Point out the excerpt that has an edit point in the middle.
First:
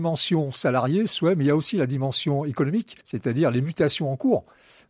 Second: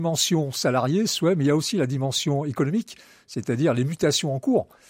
first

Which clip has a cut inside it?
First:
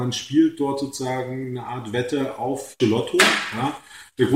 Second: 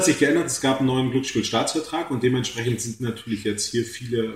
first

